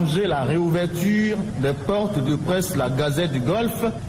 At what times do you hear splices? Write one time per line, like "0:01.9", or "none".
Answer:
0:02.3